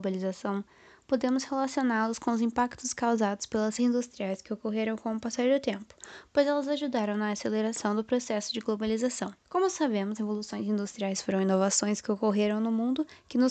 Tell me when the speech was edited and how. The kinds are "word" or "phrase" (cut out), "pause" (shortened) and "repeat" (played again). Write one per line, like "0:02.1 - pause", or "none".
0:03.8 - word
0:09.4 - pause
0:10.2 - word